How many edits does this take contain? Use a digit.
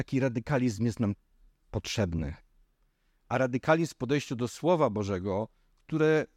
0